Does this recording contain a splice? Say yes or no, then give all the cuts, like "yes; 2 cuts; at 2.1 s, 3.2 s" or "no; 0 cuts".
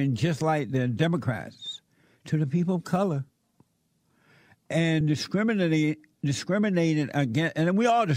no; 0 cuts